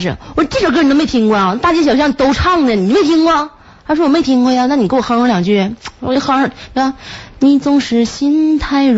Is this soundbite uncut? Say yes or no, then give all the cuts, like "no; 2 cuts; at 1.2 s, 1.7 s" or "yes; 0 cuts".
yes; 0 cuts